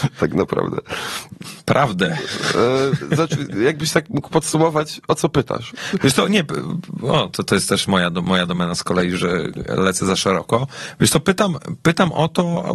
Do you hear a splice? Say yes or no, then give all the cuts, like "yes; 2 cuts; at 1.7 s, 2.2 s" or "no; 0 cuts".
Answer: no; 0 cuts